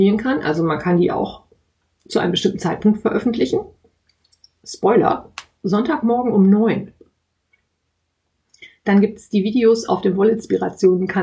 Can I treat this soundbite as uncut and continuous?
yes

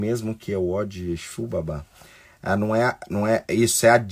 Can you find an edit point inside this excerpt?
no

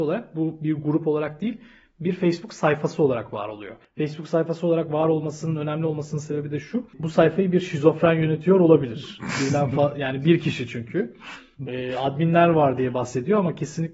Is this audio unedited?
yes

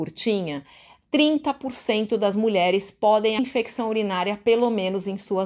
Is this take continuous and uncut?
no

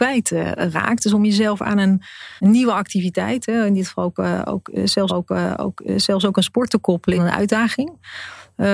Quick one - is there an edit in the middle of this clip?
yes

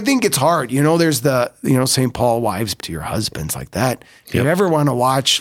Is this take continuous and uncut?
no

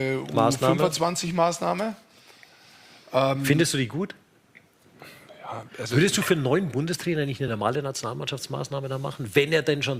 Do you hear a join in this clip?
no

